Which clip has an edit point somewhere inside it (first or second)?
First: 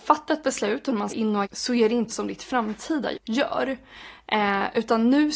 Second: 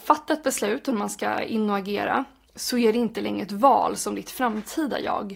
first